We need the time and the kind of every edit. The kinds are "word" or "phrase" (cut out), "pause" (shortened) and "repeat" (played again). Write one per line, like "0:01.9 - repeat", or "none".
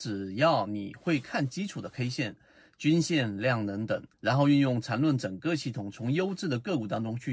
0:04.1 - pause